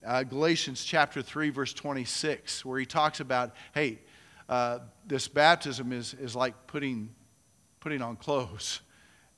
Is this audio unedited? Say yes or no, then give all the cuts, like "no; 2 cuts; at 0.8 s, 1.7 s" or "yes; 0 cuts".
yes; 0 cuts